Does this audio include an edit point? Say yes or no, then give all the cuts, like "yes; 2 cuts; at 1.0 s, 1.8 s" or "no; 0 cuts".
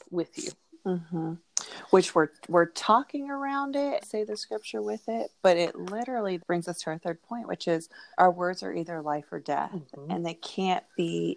yes; 3 cuts; at 4.0 s, 6.4 s, 8.1 s